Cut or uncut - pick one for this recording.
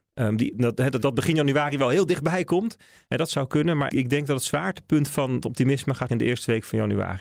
cut